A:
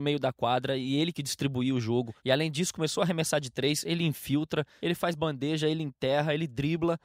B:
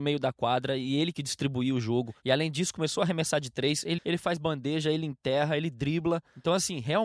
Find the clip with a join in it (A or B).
B